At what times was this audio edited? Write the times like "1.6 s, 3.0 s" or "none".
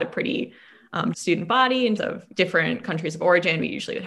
1.1 s, 2.0 s, 2.3 s